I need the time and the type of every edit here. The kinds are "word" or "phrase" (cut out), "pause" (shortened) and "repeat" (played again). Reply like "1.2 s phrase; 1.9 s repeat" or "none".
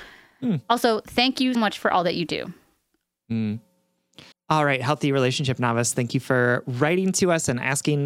1.5 s word; 4.3 s pause